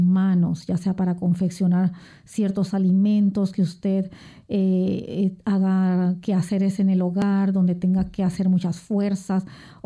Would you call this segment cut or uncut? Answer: uncut